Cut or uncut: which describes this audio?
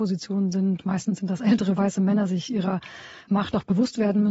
cut